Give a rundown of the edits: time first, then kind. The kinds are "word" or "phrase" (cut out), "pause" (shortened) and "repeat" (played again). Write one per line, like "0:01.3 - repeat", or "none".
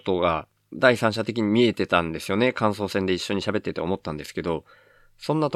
none

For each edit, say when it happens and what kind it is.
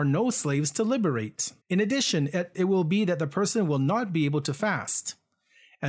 0:01.6 - pause
0:02.5 - word

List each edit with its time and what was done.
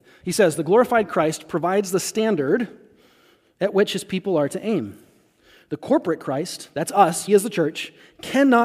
0:07.3 - word

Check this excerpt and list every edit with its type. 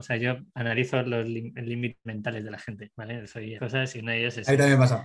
0:02.1 - word
0:03.6 - phrase

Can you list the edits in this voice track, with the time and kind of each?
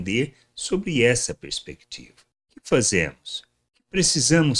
none

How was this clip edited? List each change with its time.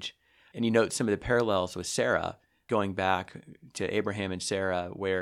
none

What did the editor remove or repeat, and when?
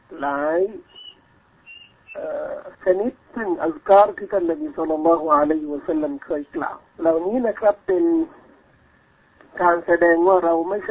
0:02.7 - pause
0:03.2 - pause
0:06.9 - pause

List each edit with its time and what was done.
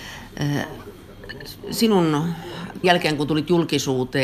0:02.8 - word

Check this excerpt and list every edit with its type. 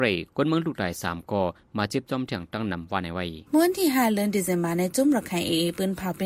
0:03.5 - pause

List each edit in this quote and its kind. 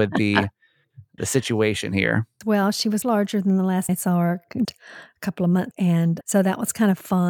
0:01.2 - word
0:03.0 - word
0:03.9 - word
0:04.6 - word
0:05.7 - word
0:06.2 - word

